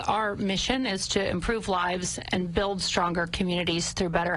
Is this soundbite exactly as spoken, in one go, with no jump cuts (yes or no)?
yes